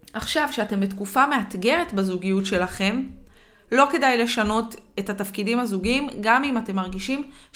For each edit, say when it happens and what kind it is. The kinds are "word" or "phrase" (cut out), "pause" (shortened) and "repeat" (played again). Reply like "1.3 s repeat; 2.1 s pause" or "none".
none

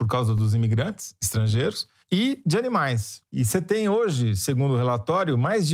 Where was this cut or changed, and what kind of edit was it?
none

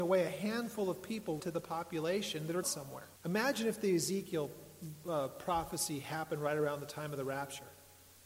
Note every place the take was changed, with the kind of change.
1.4 s word; 2.6 s word; 3.2 s pause

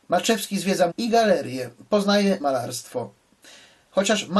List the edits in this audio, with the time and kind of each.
0.9 s word; 2.4 s word

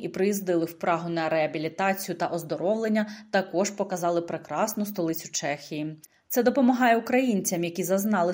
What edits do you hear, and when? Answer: none

